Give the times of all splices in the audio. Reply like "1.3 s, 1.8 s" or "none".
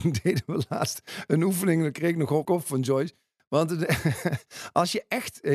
2.4 s